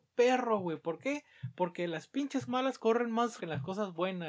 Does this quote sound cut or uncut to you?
cut